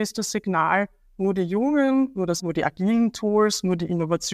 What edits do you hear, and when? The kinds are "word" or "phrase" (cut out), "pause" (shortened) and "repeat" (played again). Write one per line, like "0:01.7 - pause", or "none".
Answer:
0:02.4 - word